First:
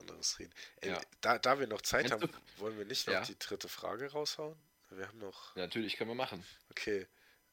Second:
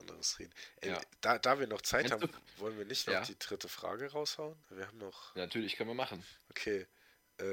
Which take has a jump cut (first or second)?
second